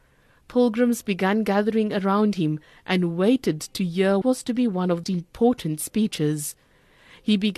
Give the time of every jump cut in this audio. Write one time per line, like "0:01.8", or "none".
0:04.2
0:05.0